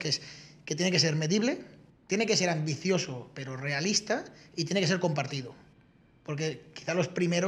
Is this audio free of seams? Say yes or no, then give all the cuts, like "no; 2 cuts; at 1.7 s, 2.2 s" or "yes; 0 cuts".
yes; 0 cuts